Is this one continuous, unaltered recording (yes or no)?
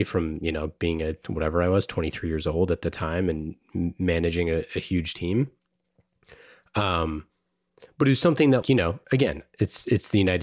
no